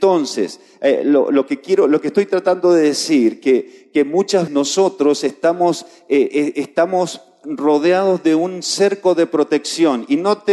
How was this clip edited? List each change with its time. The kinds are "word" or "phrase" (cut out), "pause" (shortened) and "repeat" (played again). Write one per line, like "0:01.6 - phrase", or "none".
0:04.5 - word

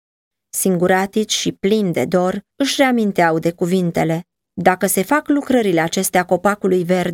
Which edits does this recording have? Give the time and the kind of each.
none

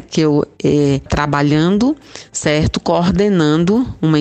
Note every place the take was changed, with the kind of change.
0:01.1 - word

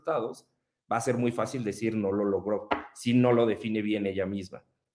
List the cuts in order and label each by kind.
none

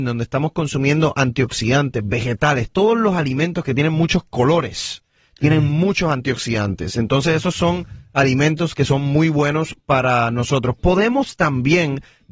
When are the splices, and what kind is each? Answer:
none

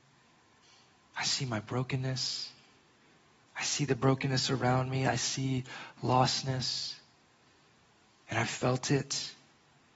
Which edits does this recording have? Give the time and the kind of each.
none

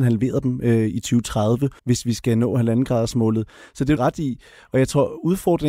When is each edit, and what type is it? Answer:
0:01.8 - pause
0:04.0 - phrase

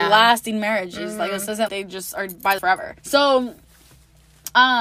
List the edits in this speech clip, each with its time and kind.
0:01.7 - word
0:02.6 - word
0:03.0 - pause

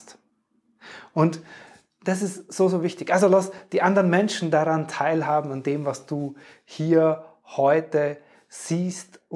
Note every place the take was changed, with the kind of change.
none

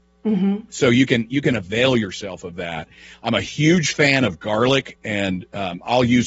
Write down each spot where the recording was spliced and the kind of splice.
none

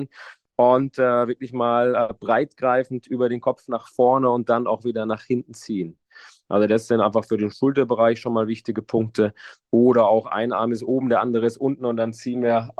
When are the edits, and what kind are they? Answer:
none

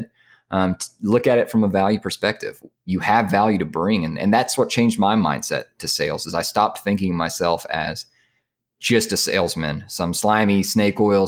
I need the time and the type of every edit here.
none

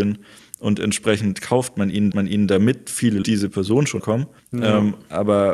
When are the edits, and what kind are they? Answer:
0:02.1 - repeat
0:03.2 - phrase
0:04.0 - word
0:04.4 - pause

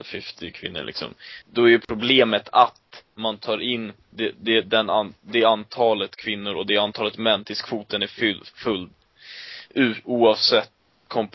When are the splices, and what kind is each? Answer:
0:04.0 - pause

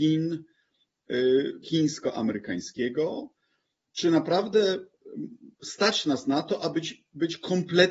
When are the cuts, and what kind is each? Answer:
0:01.6 - phrase

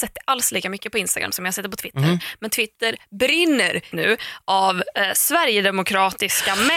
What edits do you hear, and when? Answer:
0:03.9 - word

